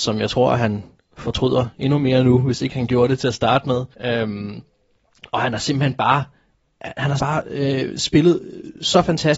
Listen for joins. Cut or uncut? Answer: cut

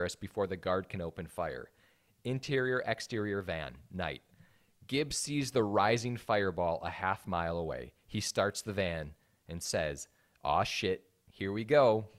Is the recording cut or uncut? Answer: uncut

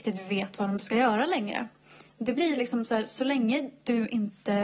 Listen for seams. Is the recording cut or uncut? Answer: uncut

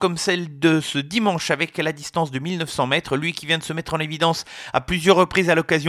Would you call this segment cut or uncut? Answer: uncut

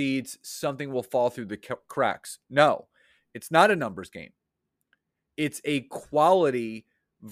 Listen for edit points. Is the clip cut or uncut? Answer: uncut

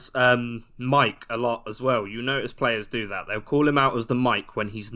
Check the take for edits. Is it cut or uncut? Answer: uncut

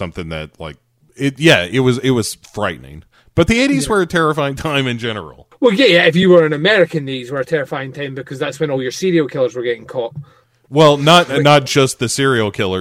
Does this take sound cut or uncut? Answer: uncut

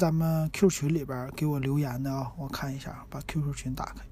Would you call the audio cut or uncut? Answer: uncut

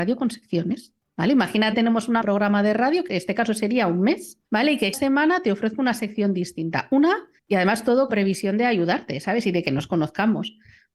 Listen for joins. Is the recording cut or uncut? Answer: cut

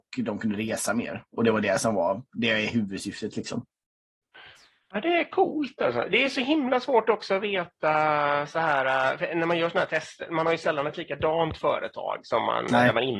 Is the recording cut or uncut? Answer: uncut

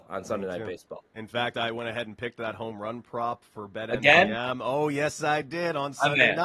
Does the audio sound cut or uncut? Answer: uncut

